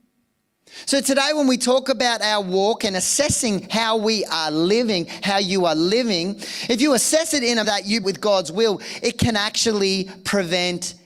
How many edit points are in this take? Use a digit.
2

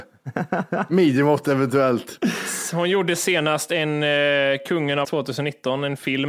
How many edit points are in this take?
1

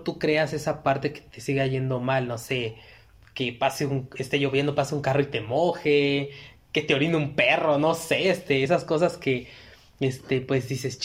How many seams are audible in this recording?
0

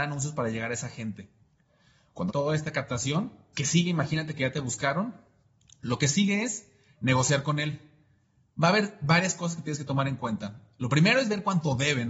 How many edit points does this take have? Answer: 2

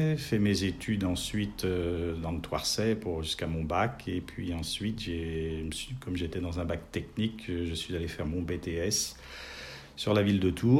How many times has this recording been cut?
0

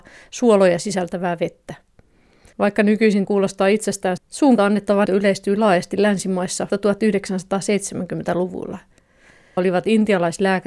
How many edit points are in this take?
6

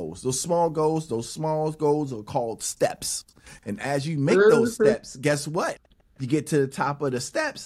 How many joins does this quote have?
0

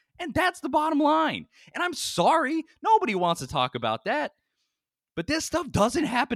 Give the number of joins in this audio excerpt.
0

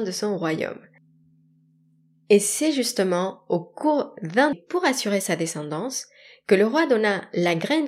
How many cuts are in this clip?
1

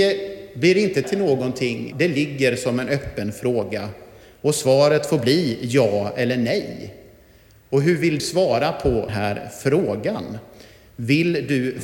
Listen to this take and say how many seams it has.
4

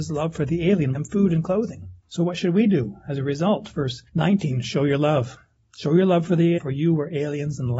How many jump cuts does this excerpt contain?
5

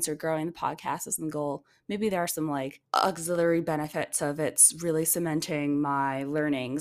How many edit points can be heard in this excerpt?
1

